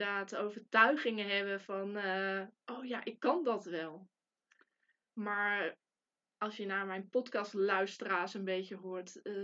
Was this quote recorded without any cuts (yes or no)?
yes